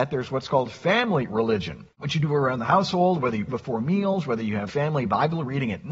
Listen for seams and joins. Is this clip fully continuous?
no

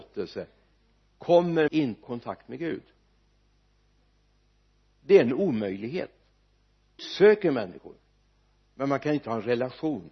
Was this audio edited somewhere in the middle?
yes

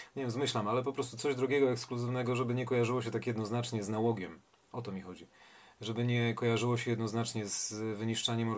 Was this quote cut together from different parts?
no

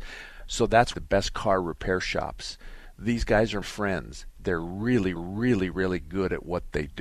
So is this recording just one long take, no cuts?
no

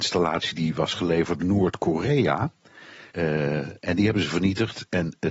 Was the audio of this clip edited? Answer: yes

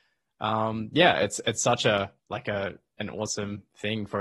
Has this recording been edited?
yes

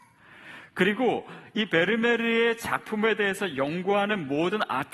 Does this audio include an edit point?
no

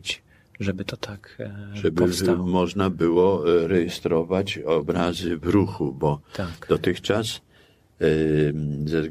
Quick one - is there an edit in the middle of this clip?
no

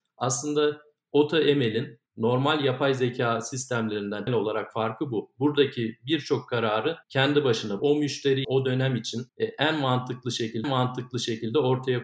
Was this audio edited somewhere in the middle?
yes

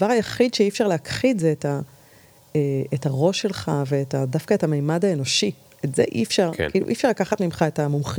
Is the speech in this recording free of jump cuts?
yes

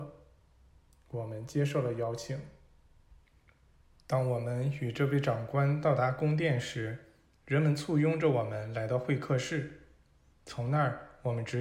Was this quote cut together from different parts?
no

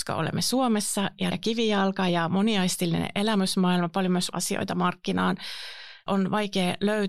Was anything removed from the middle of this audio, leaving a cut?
yes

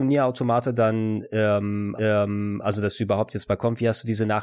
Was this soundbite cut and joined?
yes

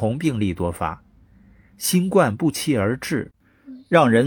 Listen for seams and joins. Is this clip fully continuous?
yes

